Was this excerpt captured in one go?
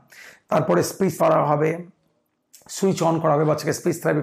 no; 1 cut; at 1.2 s

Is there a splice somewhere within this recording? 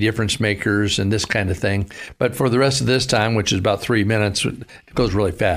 no; 0 cuts

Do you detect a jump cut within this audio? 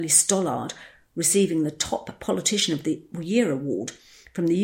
no; 0 cuts

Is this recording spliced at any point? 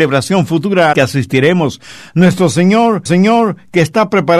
yes; 2 cuts; at 0.9 s, 3.1 s

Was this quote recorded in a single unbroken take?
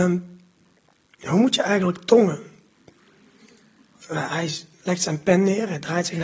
yes; 0 cuts

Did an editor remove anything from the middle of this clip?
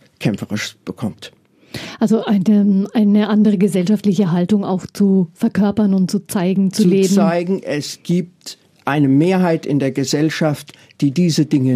no; 0 cuts

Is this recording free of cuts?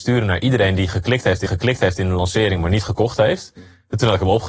no; 1 cut; at 1.5 s

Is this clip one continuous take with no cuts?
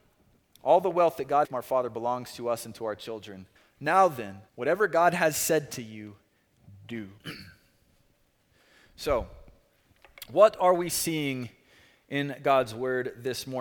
no; 4 cuts; at 1.4 s, 3.6 s, 4.5 s, 7.2 s

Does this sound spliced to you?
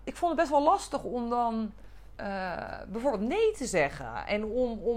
no; 0 cuts

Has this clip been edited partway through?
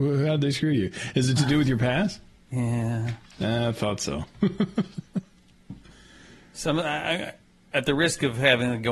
no; 0 cuts

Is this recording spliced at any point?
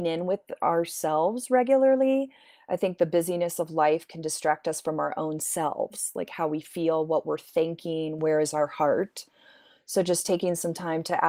no; 0 cuts

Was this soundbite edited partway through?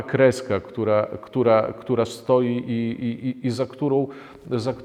no; 0 cuts

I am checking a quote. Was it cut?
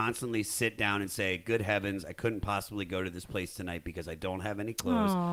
no; 0 cuts

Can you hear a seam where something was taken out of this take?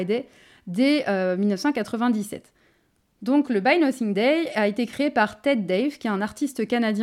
no; 0 cuts

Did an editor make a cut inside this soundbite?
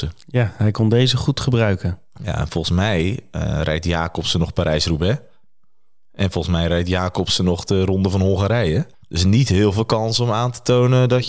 yes; 1 cut; at 8.9 s

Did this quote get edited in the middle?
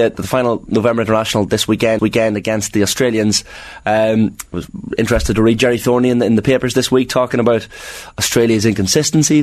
yes; 1 cut; at 2.0 s

